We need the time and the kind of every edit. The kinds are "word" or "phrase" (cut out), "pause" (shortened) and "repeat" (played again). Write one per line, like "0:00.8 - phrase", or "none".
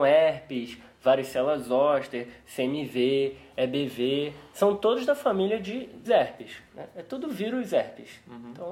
0:06.0 - word